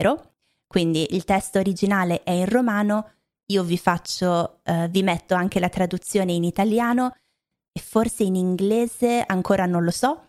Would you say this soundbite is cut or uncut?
uncut